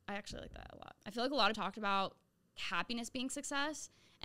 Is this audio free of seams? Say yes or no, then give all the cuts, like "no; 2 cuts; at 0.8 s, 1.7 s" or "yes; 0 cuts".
no; 3 cuts; at 1.0 s, 1.5 s, 2.6 s